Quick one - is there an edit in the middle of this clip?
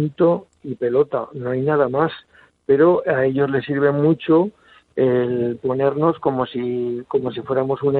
no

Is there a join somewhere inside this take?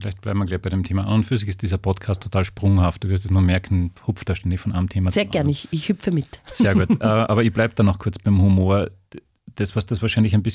no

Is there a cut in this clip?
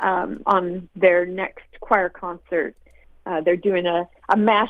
no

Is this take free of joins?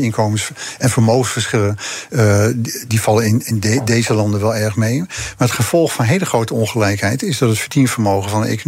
yes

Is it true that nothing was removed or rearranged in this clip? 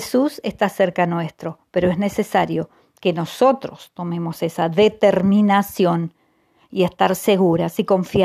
yes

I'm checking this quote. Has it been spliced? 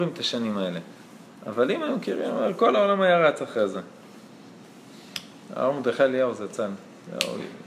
no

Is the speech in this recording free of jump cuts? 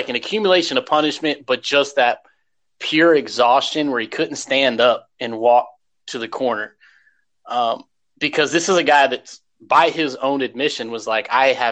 yes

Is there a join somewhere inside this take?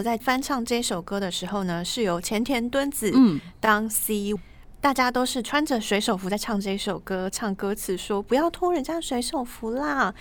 yes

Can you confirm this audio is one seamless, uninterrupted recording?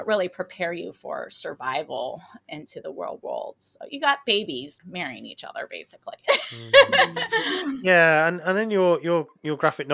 no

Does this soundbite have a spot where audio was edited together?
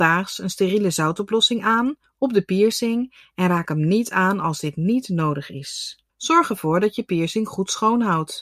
yes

